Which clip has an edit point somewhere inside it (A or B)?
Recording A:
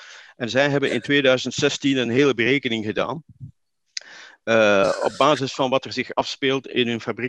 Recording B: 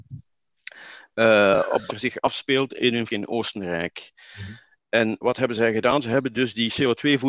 B